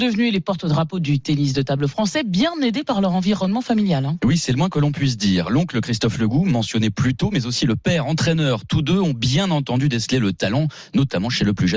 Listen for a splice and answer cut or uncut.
uncut